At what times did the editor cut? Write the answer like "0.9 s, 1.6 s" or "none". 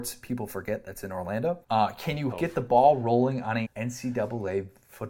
1.6 s, 2.3 s, 3.6 s